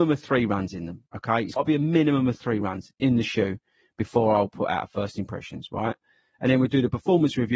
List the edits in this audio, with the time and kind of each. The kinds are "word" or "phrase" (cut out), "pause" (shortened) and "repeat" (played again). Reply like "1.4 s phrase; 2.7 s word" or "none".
1.6 s word